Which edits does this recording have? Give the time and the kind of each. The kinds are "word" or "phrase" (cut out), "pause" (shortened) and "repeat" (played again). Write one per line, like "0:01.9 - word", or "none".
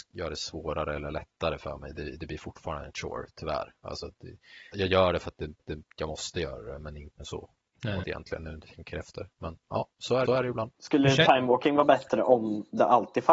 0:04.7 - word
0:05.6 - repeat
0:07.2 - word
0:08.0 - phrase
0:10.3 - repeat
0:10.7 - pause

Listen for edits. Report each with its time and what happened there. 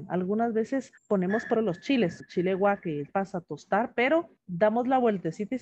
0:01.0 - pause
0:01.5 - word
0:02.2 - word
0:03.1 - word
0:04.4 - pause

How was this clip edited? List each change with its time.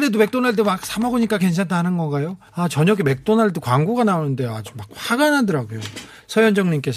0:01.4 - word
0:02.5 - pause

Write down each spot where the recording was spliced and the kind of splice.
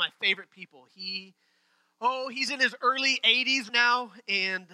0:03.7 - word

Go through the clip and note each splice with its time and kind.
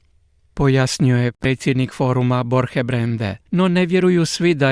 0:03.5 - pause

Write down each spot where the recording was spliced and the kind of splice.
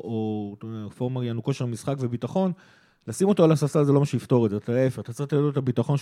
none

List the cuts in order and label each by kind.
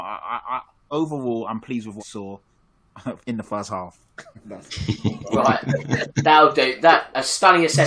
0:02.0 - word
0:03.2 - pause

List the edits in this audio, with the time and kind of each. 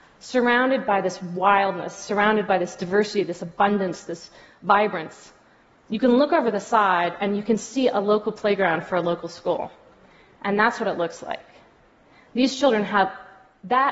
none

